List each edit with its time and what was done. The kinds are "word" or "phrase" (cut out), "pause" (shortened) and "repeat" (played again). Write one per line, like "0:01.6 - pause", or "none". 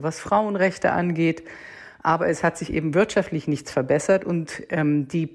none